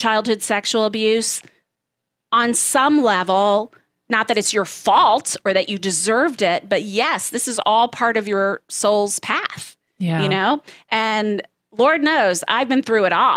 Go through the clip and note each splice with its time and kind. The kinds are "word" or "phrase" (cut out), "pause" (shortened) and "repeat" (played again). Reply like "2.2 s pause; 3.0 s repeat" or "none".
none